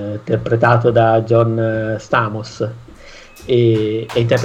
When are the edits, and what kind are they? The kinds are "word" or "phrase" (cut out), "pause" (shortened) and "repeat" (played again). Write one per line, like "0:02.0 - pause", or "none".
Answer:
none